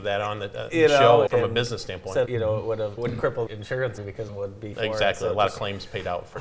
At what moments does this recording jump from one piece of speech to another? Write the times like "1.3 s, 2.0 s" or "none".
1.3 s, 2.3 s, 3.0 s, 3.5 s, 4.0 s, 4.3 s, 4.7 s

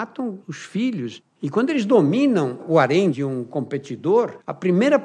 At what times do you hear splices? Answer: none

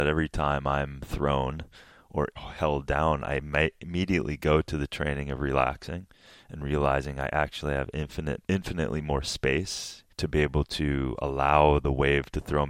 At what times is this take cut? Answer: 2.4 s, 8.5 s, 10.1 s

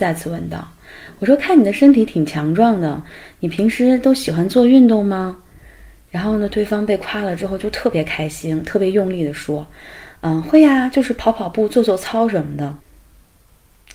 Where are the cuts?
12.8 s

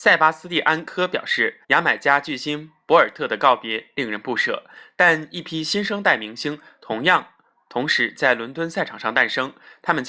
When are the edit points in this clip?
1.6 s

